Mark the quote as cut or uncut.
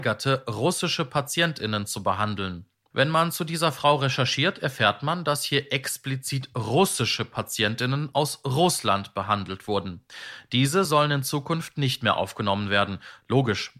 uncut